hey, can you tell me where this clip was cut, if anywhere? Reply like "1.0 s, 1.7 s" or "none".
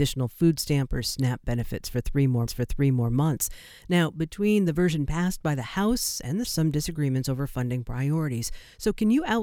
2.5 s, 6.4 s